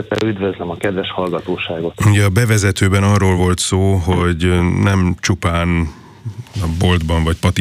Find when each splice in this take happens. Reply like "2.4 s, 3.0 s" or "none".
none